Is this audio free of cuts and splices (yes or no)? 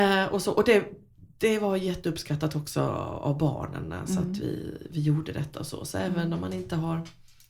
yes